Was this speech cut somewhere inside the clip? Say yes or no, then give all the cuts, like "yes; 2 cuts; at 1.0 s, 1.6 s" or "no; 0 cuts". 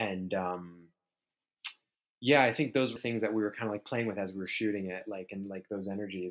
yes; 1 cut; at 3.0 s